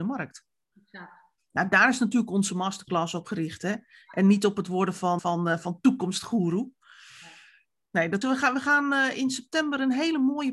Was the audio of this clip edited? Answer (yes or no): yes